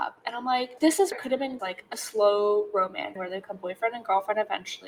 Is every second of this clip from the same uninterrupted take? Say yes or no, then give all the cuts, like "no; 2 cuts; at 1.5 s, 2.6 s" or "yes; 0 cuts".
no; 3 cuts; at 1.1 s, 1.6 s, 3.2 s